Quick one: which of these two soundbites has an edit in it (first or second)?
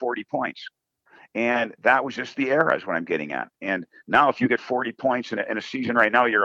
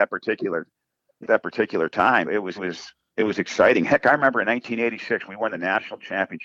second